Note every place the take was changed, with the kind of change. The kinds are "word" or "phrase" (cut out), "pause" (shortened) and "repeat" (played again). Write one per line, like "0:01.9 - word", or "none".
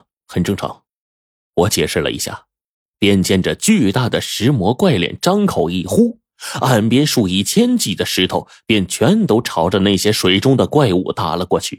none